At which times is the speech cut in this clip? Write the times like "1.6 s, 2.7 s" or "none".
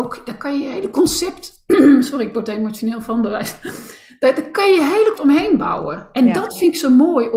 5.2 s